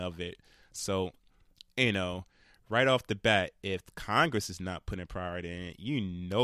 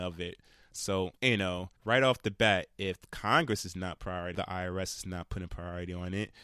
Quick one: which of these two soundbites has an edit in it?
second; 4 cuts; at 1.2 s, 1.8 s, 4.0 s, 4.3 s

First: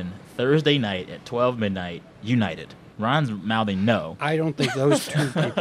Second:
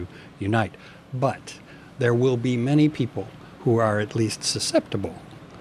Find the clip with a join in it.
first; 1 cut; at 2.9 s

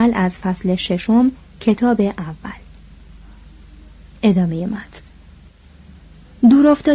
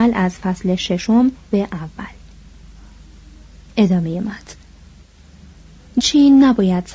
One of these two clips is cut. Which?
second; 2 cuts; at 1.5 s, 6.0 s

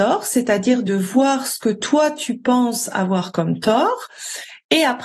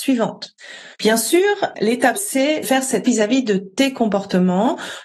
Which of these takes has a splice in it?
second; 4 cuts; at 0.9 s, 2.1 s, 2.6 s, 3.0 s

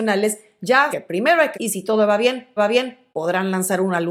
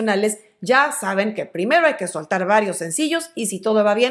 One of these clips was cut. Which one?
first; 3 cuts; at 0.9 s, 1.5 s, 2.6 s

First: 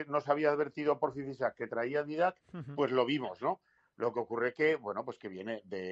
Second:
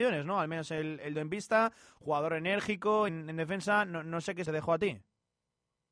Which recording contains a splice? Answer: second; 3 cuts; at 1.1 s, 3.1 s, 4.5 s

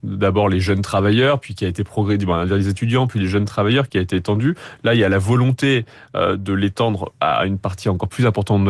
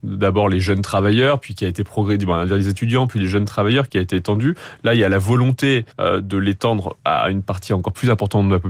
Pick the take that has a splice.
second; 1 cut; at 5.9 s

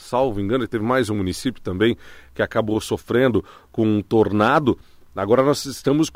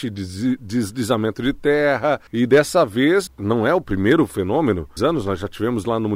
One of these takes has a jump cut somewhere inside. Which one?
second; 3 cuts; at 2.3 s, 3.3 s, 5.0 s

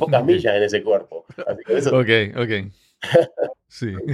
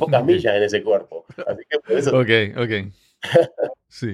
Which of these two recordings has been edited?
first; 1 cut; at 1.6 s

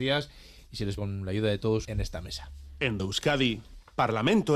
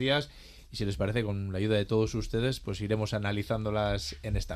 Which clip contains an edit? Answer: first; 3 cuts; at 1.0 s, 1.8 s, 3.0 s

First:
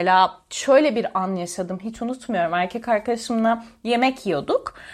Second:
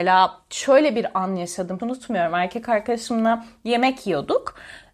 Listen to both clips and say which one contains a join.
second; 1 cut; at 1.8 s

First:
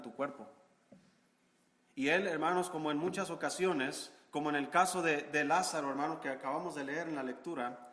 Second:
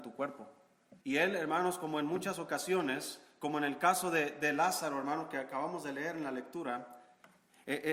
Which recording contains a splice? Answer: second; 1 cut; at 1.0 s

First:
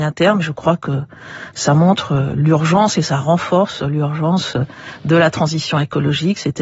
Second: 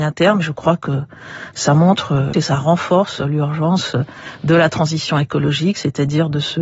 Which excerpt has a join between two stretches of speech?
second; 1 cut; at 2.3 s

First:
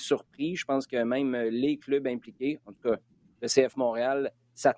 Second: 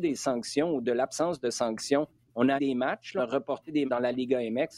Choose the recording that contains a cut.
second; 3 cuts; at 2.6 s, 3.2 s, 3.9 s

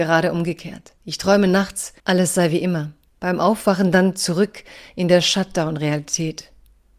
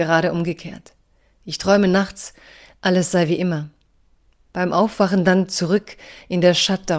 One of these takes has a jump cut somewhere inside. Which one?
first; 3 cuts; at 1.0 s, 2.0 s, 3.1 s

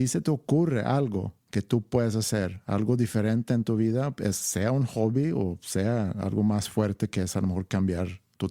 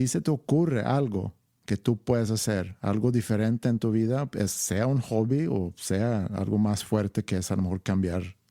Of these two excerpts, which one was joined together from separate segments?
first; 1 cut; at 1.4 s

